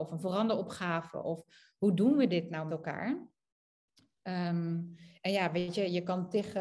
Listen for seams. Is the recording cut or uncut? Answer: cut